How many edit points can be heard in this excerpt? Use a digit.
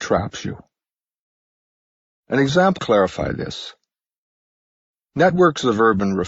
1